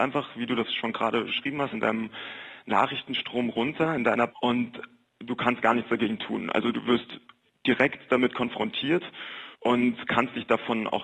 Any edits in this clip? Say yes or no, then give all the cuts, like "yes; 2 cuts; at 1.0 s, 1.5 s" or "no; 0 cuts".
yes; 6 cuts; at 1.3 s, 1.7 s, 4.3 s, 5.0 s, 6.7 s, 9.5 s